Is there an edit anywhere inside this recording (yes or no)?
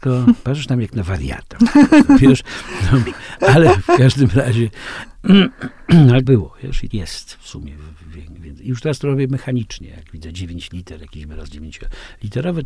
yes